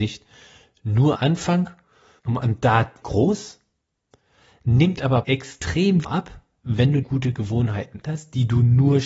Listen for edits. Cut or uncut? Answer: cut